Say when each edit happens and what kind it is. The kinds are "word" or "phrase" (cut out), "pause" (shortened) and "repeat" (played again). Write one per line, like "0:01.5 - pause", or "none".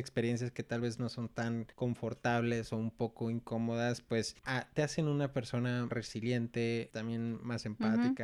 0:01.7 - pause
0:04.4 - pause
0:05.9 - word
0:06.9 - word